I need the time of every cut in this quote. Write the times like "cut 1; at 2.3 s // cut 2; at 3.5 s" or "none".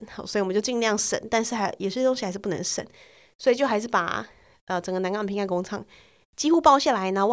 none